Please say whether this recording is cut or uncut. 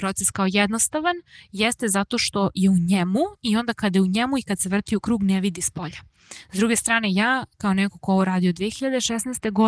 uncut